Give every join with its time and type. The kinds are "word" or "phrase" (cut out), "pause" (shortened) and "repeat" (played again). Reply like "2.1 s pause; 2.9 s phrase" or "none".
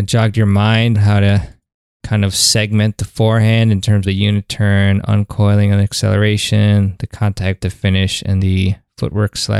0.9 s word; 4.0 s word; 7.6 s word; 8.4 s word

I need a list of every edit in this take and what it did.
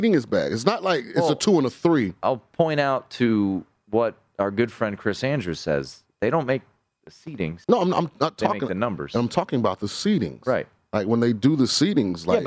7.6 s pause

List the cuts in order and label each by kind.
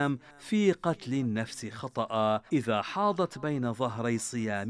2.5 s pause

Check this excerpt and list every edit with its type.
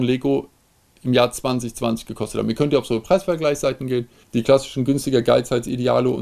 4.2 s pause

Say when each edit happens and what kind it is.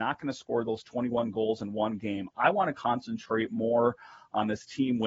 none

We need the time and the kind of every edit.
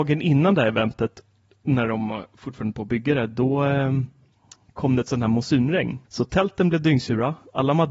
6.0 s pause

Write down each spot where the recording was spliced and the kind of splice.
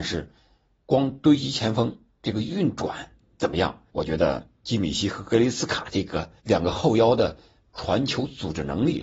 3.9 s pause; 4.5 s pause; 6.4 s pause

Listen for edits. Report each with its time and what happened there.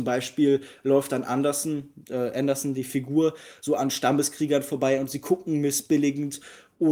none

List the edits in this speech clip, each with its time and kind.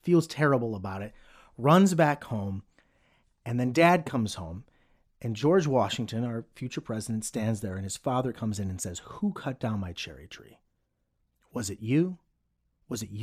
none

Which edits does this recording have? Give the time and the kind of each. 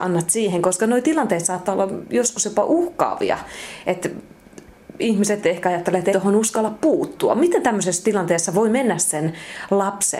6.1 s word

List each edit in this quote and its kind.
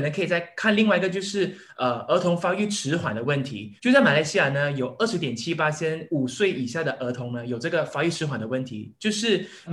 3.8 s pause

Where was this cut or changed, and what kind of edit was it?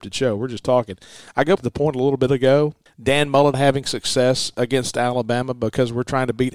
1.6 s word; 2.9 s word; 3.5 s word

